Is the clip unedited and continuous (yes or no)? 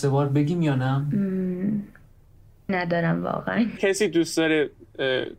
no